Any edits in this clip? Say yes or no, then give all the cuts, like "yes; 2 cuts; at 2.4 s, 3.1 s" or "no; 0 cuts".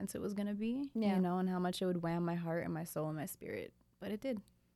no; 0 cuts